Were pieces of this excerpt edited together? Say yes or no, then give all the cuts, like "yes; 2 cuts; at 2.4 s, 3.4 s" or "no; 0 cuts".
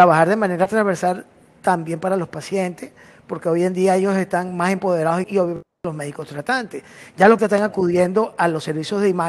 yes; 2 cuts; at 5.2 s, 7.4 s